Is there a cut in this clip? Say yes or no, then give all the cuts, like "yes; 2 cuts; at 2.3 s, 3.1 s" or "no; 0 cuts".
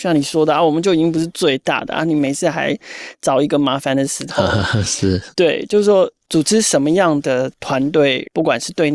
no; 0 cuts